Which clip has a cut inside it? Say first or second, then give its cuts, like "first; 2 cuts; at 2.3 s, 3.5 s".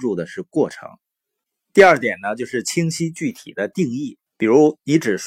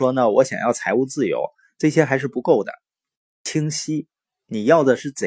first; 1 cut; at 4.3 s